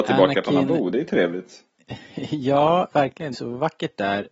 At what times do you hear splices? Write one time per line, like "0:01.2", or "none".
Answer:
0:03.3